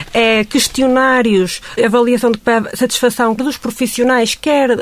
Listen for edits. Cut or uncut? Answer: cut